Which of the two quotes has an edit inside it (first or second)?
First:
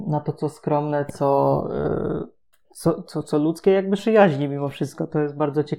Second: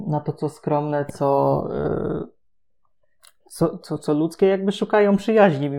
first